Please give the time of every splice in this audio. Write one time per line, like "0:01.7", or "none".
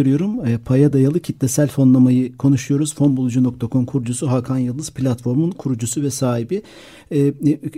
none